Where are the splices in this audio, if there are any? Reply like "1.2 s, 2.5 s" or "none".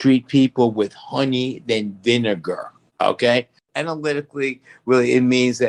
none

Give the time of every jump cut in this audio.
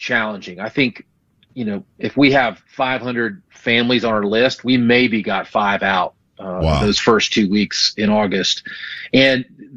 none

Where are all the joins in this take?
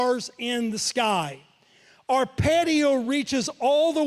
none

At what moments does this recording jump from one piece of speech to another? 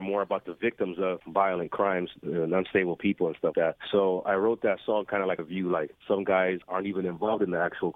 3.5 s, 5.4 s

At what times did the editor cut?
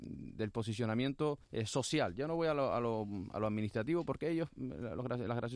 1.4 s

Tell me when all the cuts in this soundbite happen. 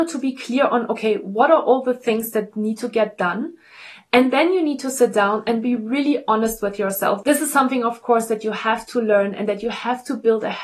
none

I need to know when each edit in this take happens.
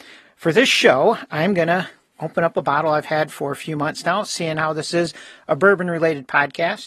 none

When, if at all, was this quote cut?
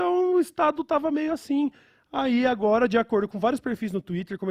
none

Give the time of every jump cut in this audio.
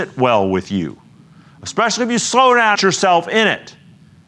2.7 s

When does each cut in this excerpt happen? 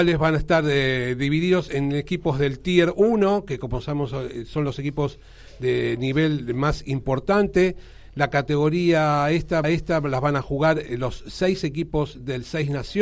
9.6 s

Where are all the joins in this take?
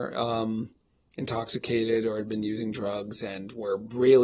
none

